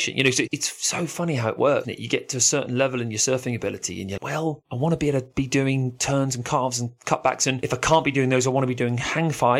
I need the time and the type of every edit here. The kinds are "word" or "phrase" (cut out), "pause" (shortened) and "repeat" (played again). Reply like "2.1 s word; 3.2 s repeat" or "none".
1.8 s word; 4.2 s word